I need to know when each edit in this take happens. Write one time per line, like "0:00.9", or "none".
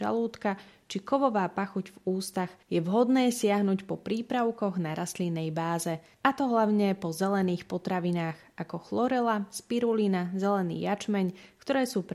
0:02.6
0:06.1